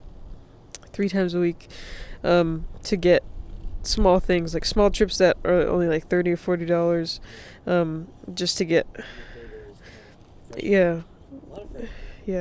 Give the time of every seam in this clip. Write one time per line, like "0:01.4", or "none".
none